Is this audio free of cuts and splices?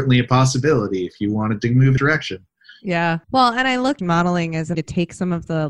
no; 4 cuts; at 2.0 s, 3.2 s, 4.0 s, 4.7 s

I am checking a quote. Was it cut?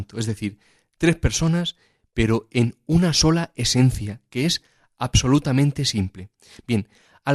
no; 0 cuts

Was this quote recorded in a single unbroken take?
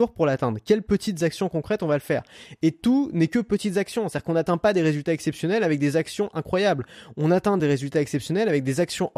yes; 0 cuts

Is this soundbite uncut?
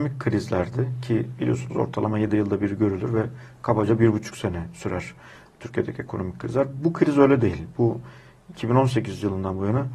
yes; 0 cuts

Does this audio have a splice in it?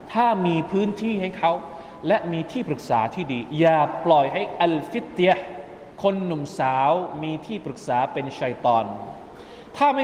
yes; 1 cut; at 5.9 s

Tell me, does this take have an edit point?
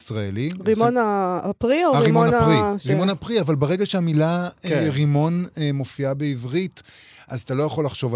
no; 0 cuts

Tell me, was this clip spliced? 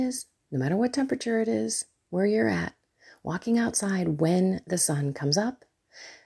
no; 0 cuts

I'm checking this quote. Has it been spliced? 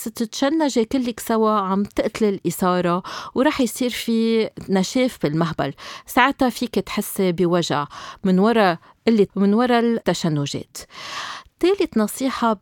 yes; 1 cut; at 9.3 s

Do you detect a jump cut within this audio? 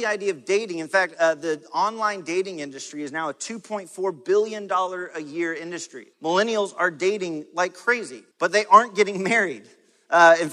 yes; 2 cuts; at 6.1 s, 8.3 s

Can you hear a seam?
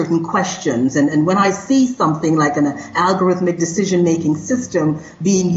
no; 0 cuts

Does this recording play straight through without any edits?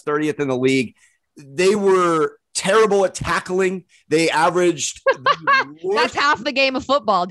yes; 0 cuts

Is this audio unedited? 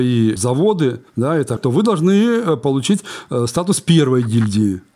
no; 2 cuts; at 1.1 s, 1.6 s

